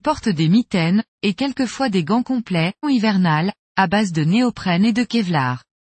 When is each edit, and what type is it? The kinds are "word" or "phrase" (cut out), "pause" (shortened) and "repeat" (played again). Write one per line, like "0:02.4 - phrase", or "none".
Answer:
0:02.8 - phrase